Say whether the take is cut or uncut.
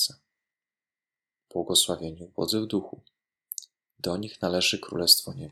uncut